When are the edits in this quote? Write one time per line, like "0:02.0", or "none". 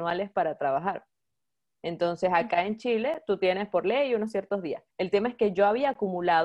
0:04.9